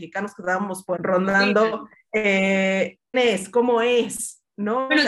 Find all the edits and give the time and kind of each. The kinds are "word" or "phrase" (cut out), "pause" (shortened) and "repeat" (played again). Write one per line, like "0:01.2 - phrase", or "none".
0:01.0 - word
0:03.1 - word